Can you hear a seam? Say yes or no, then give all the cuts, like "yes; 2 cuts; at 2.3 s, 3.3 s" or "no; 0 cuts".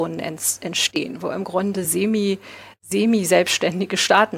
no; 0 cuts